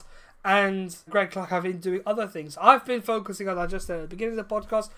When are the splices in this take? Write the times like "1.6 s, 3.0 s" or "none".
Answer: 1.1 s